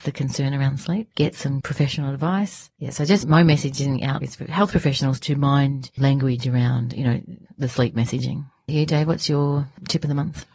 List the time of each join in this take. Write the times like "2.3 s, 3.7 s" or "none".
1.6 s, 3.2 s, 4.2 s, 5.2 s, 6.0 s, 8.7 s